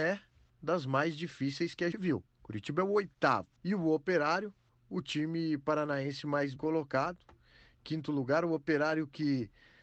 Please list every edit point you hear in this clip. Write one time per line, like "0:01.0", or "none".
0:01.9
0:02.3
0:03.6
0:04.7
0:06.6

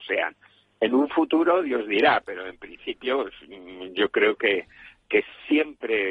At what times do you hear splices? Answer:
none

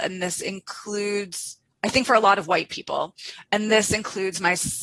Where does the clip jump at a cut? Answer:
none

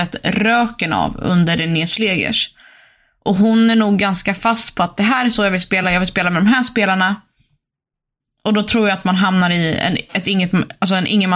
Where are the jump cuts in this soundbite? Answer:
none

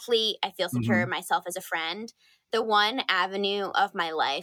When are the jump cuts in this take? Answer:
none

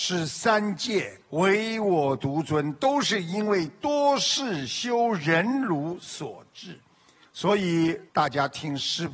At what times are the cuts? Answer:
0:01.2
0:08.1

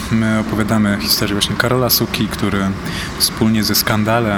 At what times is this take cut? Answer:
none

